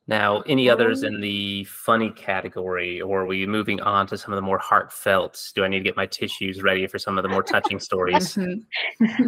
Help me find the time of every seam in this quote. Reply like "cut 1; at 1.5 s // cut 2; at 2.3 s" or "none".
none